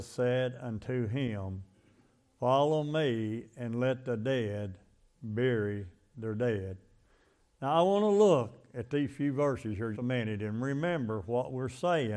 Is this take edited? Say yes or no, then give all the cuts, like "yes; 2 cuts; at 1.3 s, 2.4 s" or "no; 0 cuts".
yes; 1 cut; at 9.9 s